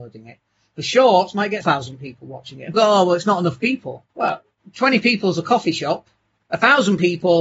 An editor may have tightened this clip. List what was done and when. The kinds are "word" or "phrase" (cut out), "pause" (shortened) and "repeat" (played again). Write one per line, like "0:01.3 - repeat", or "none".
0:01.6 - word
0:02.7 - word
0:04.1 - pause